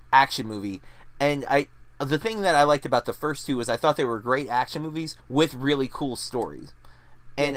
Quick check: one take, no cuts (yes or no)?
no